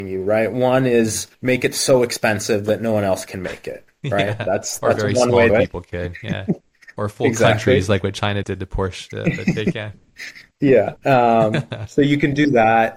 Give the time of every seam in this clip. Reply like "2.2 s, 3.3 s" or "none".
1.3 s, 5.5 s, 6.6 s, 8.4 s, 10.5 s, 11.0 s